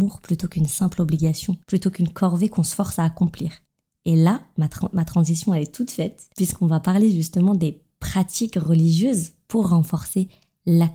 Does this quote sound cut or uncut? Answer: cut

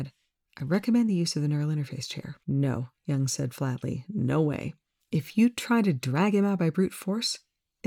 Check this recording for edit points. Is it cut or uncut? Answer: cut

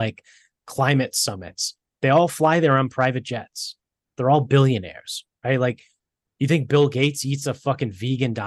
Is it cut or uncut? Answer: uncut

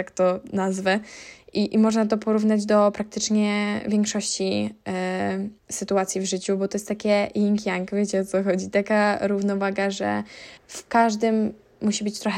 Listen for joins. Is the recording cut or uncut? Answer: cut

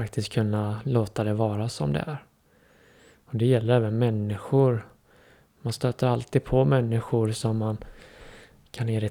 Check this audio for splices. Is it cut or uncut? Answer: uncut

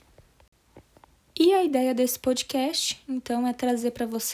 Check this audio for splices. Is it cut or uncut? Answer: uncut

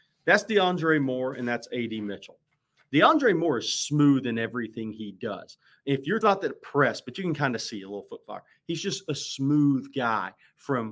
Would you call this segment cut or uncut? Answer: cut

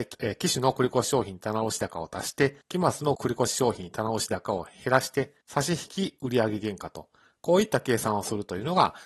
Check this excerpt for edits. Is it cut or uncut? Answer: cut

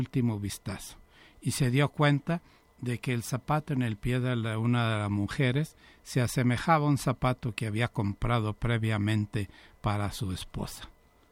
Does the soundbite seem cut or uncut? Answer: uncut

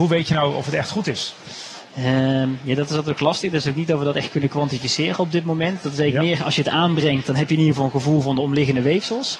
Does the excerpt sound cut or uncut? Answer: cut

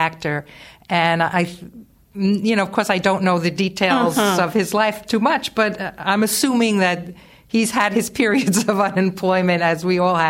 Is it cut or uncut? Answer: uncut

